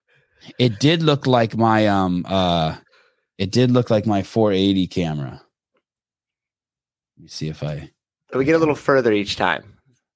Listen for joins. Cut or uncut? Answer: uncut